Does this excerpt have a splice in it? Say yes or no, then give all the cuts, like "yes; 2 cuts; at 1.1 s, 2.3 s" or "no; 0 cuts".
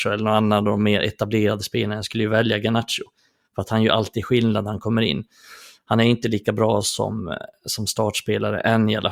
no; 0 cuts